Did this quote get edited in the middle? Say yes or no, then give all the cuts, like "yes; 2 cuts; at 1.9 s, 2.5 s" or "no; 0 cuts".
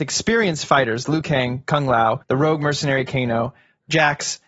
yes; 1 cut; at 2.2 s